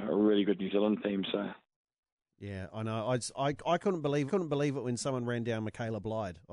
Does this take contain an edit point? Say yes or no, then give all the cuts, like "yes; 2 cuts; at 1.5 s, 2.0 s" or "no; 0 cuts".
yes; 1 cut; at 4.3 s